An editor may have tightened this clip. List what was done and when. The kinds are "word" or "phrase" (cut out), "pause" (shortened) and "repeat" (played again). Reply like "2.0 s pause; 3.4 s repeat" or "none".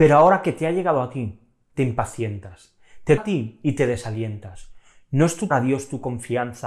3.2 s word; 5.5 s word